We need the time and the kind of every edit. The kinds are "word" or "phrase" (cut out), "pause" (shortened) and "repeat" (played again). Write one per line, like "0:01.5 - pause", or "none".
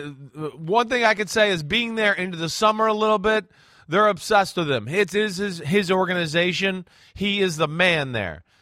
none